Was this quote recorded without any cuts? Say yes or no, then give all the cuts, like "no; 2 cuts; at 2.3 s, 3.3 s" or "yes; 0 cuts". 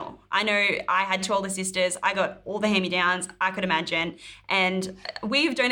yes; 0 cuts